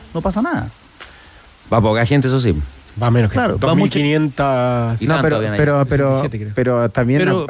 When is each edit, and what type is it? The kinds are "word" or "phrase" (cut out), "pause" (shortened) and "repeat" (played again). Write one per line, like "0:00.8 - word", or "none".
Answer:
none